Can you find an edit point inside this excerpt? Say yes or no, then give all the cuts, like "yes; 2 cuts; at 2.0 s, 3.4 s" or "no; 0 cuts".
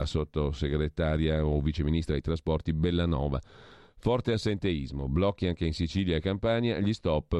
no; 0 cuts